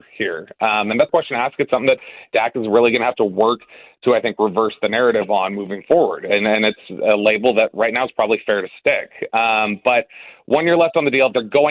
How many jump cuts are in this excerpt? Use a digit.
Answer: 1